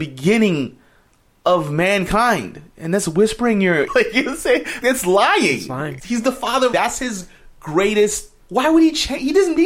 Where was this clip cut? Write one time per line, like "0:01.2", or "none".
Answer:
0:03.9
0:04.8
0:06.0
0:06.7
0:08.4